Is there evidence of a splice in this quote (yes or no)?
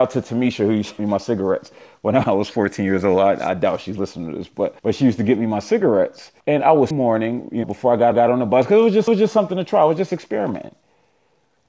yes